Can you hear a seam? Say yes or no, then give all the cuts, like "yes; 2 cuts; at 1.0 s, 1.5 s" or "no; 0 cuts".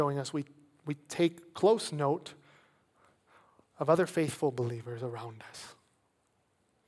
no; 0 cuts